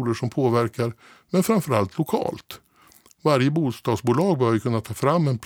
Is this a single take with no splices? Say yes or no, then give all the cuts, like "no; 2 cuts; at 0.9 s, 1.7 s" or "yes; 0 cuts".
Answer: yes; 0 cuts